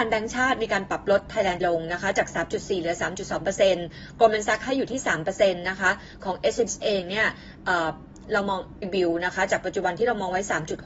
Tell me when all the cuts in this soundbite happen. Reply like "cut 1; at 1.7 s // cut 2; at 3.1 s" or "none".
cut 1; at 1.6 s // cut 2; at 6.7 s // cut 3; at 8.8 s